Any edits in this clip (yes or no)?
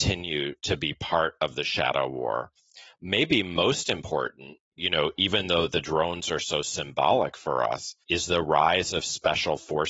yes